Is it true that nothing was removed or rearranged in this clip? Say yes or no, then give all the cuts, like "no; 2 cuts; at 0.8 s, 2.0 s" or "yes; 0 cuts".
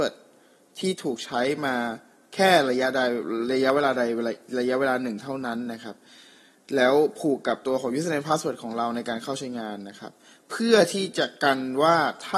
yes; 0 cuts